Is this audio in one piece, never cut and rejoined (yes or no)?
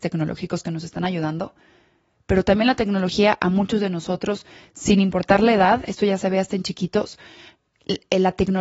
yes